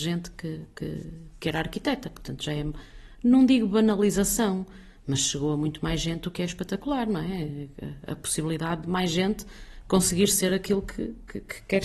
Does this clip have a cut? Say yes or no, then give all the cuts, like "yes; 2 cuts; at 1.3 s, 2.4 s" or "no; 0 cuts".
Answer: no; 0 cuts